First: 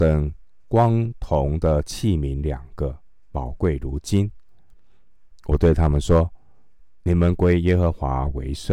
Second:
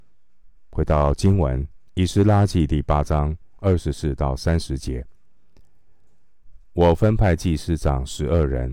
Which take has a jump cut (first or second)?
second